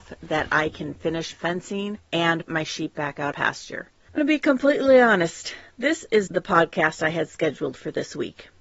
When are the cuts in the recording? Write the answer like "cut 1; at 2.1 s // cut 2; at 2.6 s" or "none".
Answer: cut 1; at 1.3 s // cut 2; at 2.5 s // cut 3; at 3.3 s // cut 4; at 4.2 s // cut 5; at 6.3 s